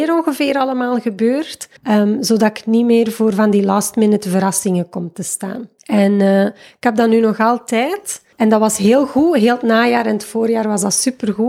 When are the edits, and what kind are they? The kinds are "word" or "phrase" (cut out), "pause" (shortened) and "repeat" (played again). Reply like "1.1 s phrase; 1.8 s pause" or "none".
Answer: 1.8 s pause; 5.8 s pause; 8.3 s pause